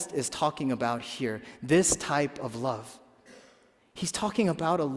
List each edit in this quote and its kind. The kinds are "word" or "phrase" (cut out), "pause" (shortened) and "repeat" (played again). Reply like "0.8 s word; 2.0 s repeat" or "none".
none